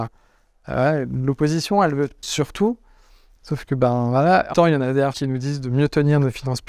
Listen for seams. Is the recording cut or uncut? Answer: cut